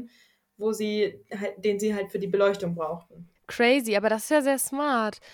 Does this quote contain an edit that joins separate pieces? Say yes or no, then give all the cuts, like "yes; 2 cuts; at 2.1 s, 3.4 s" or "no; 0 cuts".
yes; 1 cut; at 3.4 s